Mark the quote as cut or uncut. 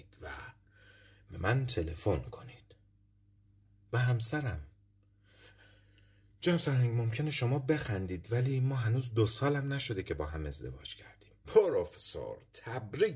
uncut